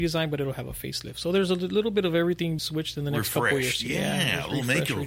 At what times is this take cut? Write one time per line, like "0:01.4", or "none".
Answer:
0:02.6